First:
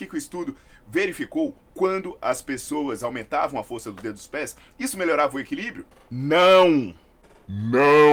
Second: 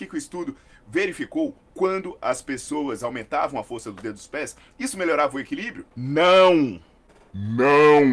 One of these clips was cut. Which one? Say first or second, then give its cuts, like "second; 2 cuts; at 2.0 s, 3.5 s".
second; 1 cut; at 5.9 s